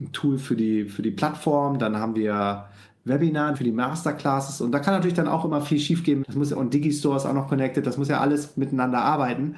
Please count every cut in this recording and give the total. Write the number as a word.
two